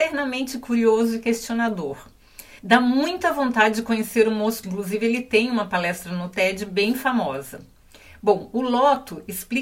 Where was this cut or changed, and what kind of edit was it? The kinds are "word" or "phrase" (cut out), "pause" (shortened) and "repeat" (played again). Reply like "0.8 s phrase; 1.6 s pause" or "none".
2.6 s pause; 4.6 s word